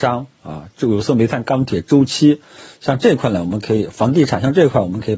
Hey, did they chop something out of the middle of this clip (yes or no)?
no